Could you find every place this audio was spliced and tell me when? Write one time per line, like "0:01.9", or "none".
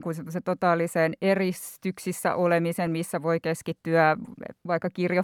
none